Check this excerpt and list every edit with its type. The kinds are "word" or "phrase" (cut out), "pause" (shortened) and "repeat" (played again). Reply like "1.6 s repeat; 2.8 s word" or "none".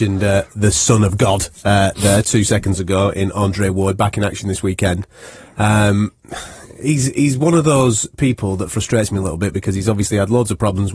none